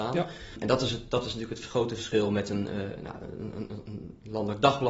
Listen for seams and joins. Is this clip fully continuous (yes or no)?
yes